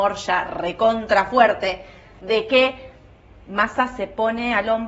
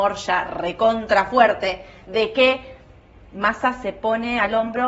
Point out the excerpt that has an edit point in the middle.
second; 1 cut; at 2.0 s

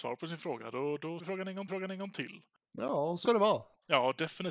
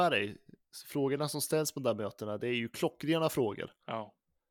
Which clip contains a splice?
first; 3 cuts; at 1.2 s, 1.7 s, 3.2 s

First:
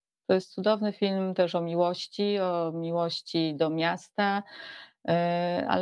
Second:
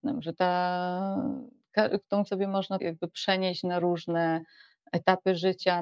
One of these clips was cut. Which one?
second; 2 cuts; at 2.3 s, 2.8 s

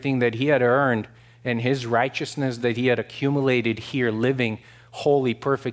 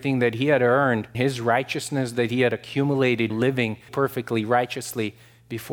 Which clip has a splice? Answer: second; 3 cuts; at 1.1 s, 3.3 s, 3.9 s

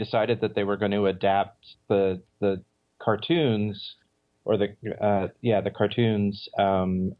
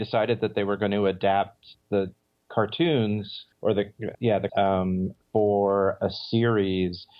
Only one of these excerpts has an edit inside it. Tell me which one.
second; 5 cuts; at 1.8 s, 3.5 s, 4.1 s, 4.5 s, 5.2 s

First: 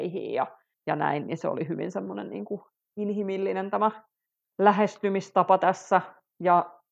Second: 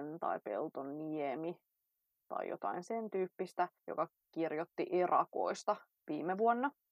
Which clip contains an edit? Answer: second; 1 cut; at 3.8 s

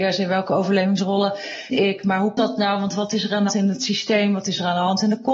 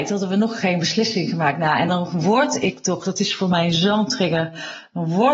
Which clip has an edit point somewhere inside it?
first; 3 cuts; at 1.7 s, 2.4 s, 3.5 s

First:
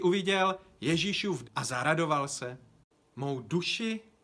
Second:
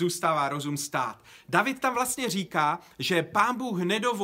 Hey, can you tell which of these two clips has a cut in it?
first; 1 cut; at 1.4 s

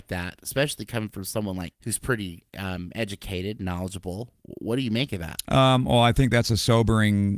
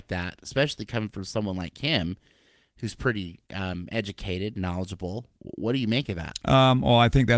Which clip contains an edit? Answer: first; 1 cut; at 1.7 s

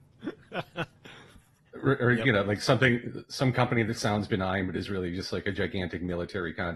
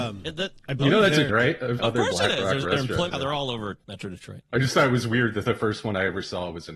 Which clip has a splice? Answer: second; 4 cuts; at 1.3 s, 1.8 s, 3.1 s, 3.8 s

